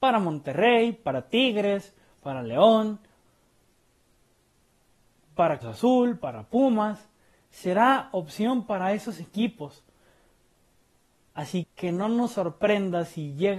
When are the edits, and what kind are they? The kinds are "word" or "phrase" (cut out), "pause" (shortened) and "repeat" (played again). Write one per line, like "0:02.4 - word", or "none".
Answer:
0:05.6 - word
0:11.6 - word